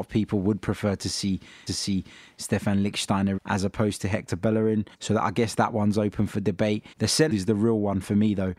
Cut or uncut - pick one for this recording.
cut